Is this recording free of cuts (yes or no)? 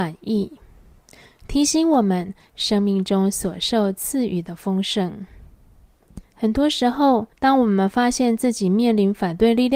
no